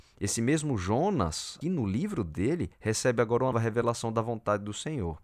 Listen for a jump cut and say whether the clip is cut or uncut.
cut